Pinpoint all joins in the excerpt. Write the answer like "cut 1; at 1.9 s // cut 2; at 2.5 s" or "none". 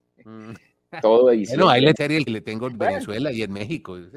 cut 1; at 1.9 s // cut 2; at 2.3 s // cut 3; at 2.7 s